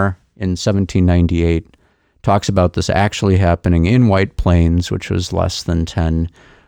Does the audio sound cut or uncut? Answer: uncut